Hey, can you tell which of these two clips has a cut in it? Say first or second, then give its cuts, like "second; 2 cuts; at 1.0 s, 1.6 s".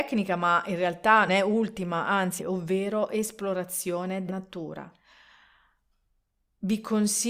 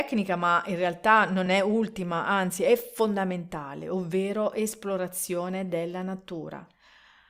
first; 3 cuts; at 1.3 s, 2.4 s, 4.3 s